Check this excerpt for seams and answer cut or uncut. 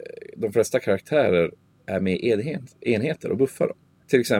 uncut